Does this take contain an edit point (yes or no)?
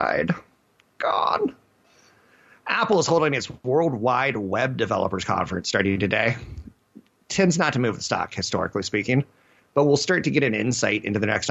no